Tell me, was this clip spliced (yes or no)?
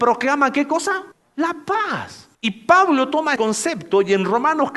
yes